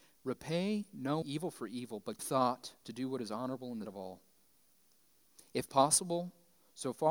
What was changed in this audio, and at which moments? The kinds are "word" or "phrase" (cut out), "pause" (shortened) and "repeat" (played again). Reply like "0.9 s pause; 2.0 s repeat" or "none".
1.2 s word; 2.2 s word; 2.8 s pause; 3.8 s word